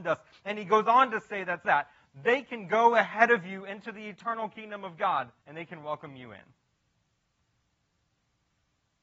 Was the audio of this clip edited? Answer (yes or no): yes